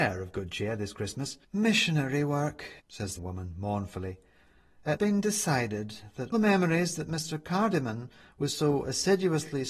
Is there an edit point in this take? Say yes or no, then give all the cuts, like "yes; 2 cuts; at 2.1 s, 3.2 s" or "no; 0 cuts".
yes; 5 cuts; at 1.4 s, 2.8 s, 3.2 s, 5.0 s, 6.3 s